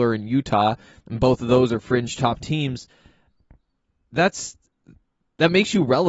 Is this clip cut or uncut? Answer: cut